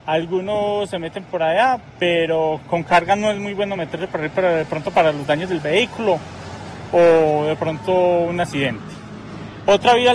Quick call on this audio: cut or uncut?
uncut